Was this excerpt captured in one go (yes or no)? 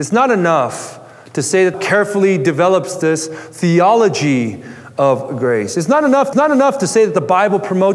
no